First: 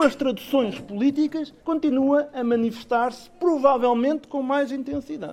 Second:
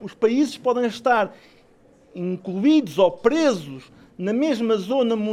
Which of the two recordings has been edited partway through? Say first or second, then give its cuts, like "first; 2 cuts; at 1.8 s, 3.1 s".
first; 1 cut; at 1.6 s